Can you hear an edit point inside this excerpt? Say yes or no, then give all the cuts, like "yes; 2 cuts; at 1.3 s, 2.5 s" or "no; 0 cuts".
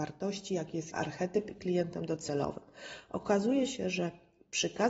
yes; 2 cuts; at 0.9 s, 1.6 s